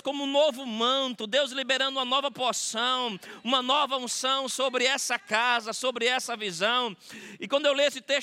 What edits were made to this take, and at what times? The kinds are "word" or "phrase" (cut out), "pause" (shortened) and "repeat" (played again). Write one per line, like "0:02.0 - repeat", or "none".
none